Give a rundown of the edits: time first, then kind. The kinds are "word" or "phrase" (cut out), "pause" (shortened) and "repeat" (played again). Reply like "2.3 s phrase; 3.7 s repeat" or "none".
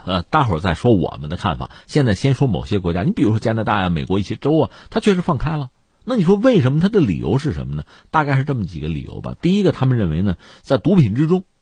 none